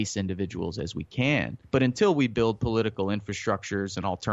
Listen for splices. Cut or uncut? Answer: cut